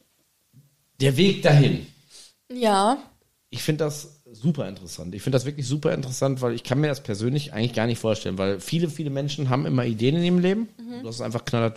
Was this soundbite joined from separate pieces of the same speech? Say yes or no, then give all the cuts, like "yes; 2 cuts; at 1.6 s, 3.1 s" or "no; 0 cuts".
no; 0 cuts